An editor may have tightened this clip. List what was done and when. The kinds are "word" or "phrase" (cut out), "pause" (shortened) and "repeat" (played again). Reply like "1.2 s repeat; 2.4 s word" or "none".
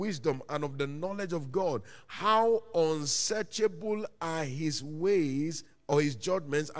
none